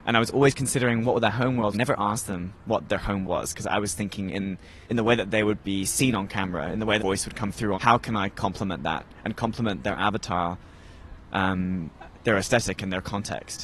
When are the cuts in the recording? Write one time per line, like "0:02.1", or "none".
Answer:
0:01.7
0:03.2
0:04.8
0:07.0
0:07.7